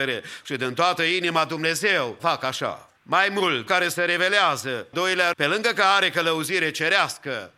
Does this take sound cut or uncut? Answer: cut